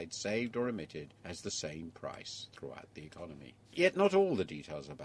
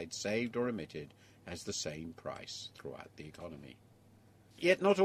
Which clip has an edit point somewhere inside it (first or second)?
first